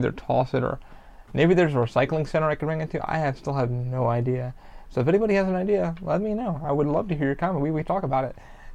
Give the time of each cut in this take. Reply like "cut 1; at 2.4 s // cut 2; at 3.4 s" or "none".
none